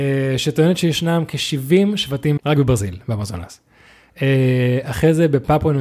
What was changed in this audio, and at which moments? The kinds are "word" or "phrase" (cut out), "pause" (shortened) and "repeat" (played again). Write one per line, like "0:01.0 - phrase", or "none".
0:02.4 - word